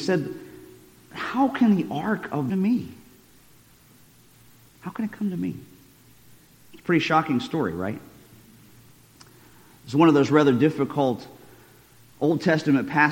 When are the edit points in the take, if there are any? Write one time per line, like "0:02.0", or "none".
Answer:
0:02.5